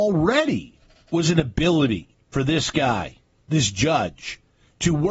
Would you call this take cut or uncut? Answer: uncut